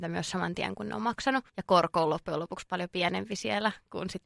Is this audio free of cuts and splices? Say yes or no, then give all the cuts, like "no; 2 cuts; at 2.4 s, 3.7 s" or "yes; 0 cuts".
no; 1 cut; at 1.5 s